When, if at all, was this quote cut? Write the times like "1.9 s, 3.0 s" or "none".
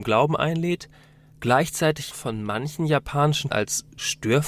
2.1 s, 3.5 s